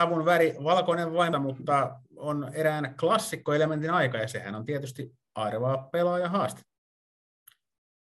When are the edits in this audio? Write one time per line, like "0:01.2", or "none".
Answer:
0:01.3
0:02.0